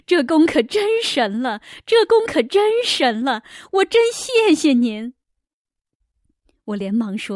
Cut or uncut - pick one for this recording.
uncut